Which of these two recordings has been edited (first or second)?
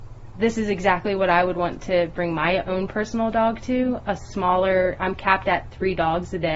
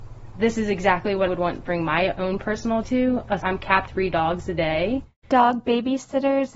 second